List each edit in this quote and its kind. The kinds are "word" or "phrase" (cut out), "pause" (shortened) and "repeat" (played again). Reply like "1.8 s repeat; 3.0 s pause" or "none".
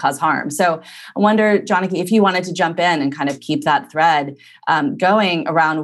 none